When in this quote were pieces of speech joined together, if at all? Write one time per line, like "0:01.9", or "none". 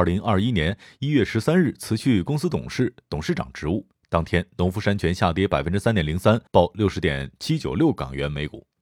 0:06.5